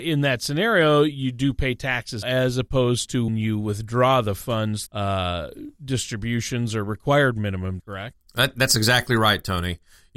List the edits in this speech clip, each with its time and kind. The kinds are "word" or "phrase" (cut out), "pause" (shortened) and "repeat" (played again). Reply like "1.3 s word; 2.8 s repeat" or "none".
2.2 s word; 3.3 s word; 4.9 s word; 7.8 s word